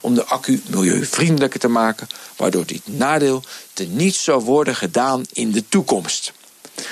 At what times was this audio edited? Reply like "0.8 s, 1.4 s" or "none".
none